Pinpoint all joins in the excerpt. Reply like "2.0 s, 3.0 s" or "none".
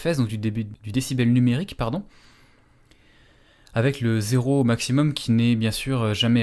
none